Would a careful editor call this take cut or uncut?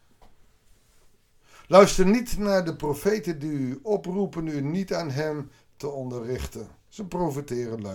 uncut